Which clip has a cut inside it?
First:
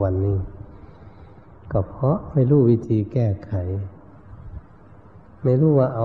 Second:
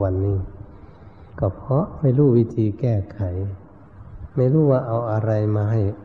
second; 2 cuts; at 1.3 s, 4.3 s

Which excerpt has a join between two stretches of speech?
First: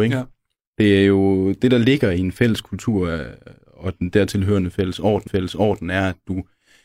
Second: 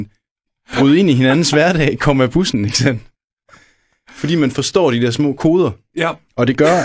first; 1 cut; at 5.3 s

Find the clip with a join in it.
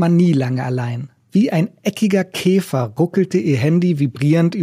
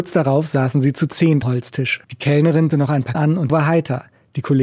second; 4 cuts; at 1.4 s, 2.7 s, 3.1 s, 3.5 s

